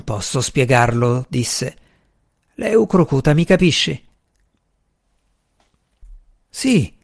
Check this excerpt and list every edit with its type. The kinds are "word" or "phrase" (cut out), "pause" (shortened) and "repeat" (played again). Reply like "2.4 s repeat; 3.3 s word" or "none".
none